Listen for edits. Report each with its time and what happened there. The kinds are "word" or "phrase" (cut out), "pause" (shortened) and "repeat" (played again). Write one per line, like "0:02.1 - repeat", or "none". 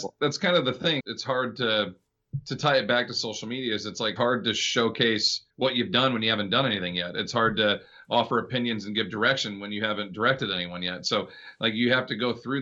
0:01.0 - phrase
0:04.2 - phrase
0:05.5 - pause